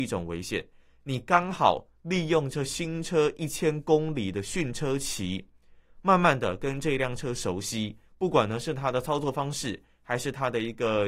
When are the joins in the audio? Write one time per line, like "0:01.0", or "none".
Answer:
0:08.1